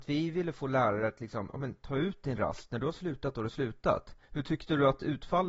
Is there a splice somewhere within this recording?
yes; 1 cut; at 4.2 s

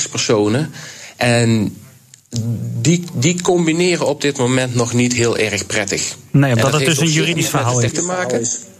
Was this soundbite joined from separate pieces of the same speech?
yes; 1 cut; at 7.9 s

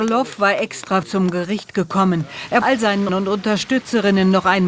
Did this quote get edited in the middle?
yes; 3 cuts; at 1.0 s, 2.6 s, 3.1 s

